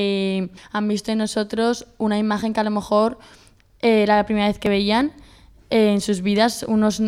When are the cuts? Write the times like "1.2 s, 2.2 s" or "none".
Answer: none